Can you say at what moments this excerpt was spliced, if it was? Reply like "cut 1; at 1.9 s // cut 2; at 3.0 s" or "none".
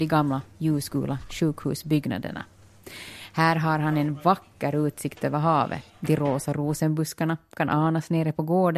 cut 1; at 5.9 s